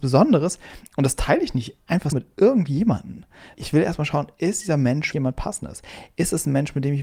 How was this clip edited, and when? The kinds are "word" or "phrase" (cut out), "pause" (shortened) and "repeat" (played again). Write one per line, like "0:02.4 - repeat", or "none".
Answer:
0:02.1 - word
0:03.5 - word
0:05.1 - word